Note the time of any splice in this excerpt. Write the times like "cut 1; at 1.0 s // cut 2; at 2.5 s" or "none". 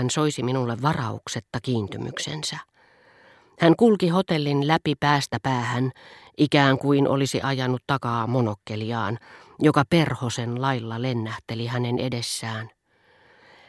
none

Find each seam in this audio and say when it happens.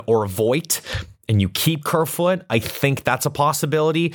none

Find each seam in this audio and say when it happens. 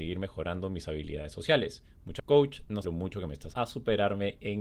cut 1; at 2.2 s // cut 2; at 2.8 s // cut 3; at 3.5 s

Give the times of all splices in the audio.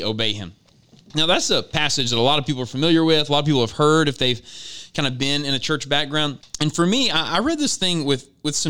cut 1; at 6.4 s

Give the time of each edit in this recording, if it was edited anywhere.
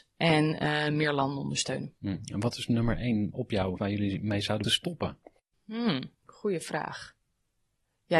cut 1; at 3.3 s // cut 2; at 3.8 s // cut 3; at 4.6 s // cut 4; at 5.4 s // cut 5; at 6.1 s

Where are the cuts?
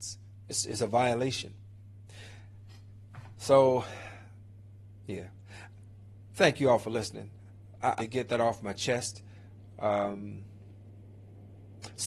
cut 1; at 8.0 s

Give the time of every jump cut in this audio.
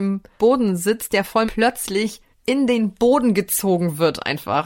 cut 1; at 1.5 s // cut 2; at 2.3 s

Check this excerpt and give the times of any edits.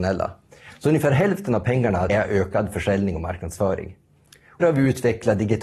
cut 1; at 2.1 s // cut 2; at 4.6 s

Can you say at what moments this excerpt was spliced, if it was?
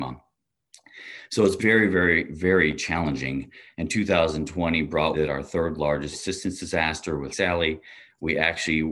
cut 1; at 1.6 s // cut 2; at 5.1 s // cut 3; at 6.1 s // cut 4; at 7.3 s

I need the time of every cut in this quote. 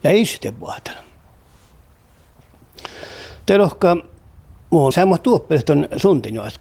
cut 1; at 3.4 s // cut 2; at 4.9 s

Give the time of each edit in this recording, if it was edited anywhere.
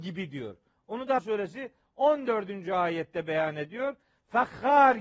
cut 1; at 1.2 s

